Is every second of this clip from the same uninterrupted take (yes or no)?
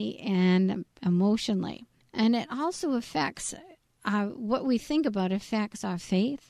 yes